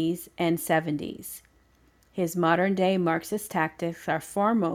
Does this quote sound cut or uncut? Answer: uncut